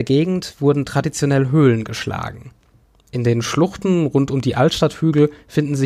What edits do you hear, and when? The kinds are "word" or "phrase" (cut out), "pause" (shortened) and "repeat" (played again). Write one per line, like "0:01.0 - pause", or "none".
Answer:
none